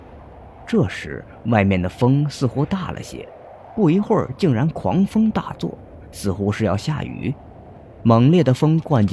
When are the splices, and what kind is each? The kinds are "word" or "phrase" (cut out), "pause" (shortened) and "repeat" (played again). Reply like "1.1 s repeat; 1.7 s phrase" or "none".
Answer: none